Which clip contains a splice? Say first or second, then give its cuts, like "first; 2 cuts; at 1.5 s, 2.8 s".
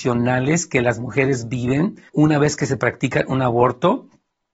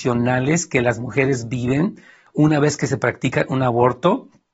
first; 1 cut; at 2.1 s